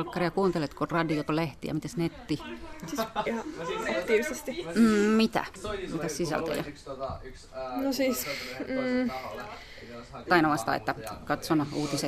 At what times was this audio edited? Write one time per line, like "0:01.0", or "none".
0:01.3
0:03.3
0:10.3